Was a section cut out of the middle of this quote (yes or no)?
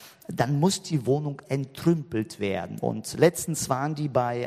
no